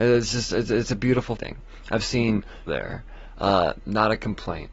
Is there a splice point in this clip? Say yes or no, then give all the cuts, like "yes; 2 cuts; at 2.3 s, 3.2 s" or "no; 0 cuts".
yes; 2 cuts; at 1.4 s, 2.7 s